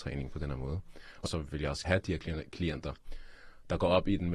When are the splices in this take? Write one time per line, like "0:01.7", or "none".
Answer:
0:01.3
0:01.8